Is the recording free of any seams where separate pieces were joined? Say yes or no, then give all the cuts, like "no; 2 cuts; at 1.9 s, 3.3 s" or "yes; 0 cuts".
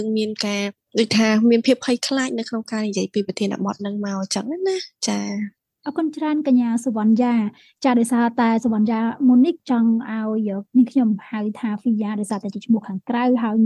yes; 0 cuts